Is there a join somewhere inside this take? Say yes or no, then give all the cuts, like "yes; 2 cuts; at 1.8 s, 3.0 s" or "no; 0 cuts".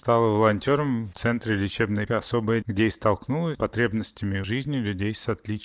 yes; 5 cuts; at 1.1 s, 2.1 s, 2.6 s, 3.5 s, 4.4 s